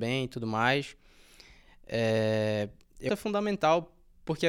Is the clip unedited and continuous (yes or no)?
no